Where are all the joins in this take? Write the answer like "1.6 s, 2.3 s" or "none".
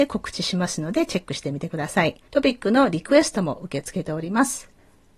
2.3 s